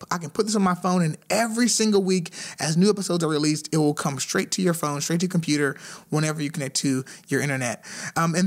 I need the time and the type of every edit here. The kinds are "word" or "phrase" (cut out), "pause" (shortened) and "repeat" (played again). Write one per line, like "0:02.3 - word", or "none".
none

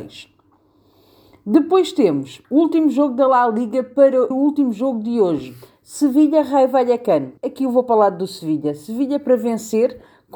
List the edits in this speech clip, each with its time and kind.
0:02.4 - pause
0:04.3 - word
0:07.4 - pause

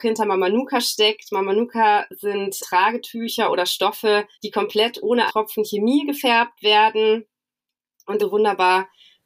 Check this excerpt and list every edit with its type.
0:02.6 - word
0:04.3 - pause
0:05.3 - word
0:08.2 - word

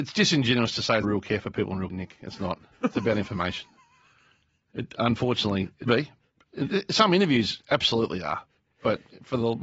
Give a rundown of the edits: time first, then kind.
0:01.0 - word
0:01.9 - word
0:05.9 - word

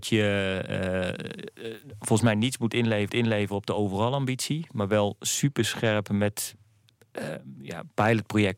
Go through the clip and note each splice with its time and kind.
0:03.1 - repeat

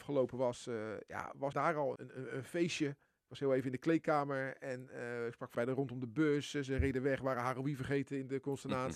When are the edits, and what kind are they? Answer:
0:01.5 - word
0:02.0 - word
0:03.1 - pause
0:05.5 - phrase

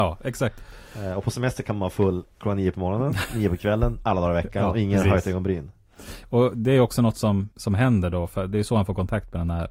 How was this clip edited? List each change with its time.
0:07.5 - pause

